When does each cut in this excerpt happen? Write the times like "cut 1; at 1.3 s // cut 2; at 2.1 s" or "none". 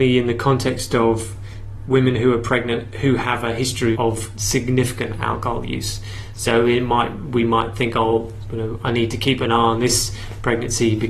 cut 1; at 3.9 s